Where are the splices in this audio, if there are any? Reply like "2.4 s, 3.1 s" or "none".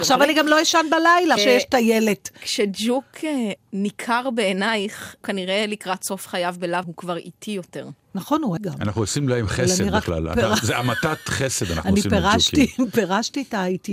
1.4 s, 3.6 s, 5.2 s, 6.8 s, 8.0 s, 8.6 s